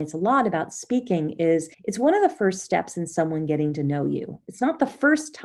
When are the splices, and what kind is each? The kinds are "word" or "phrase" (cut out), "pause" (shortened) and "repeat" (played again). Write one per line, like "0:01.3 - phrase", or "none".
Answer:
0:01.7 - pause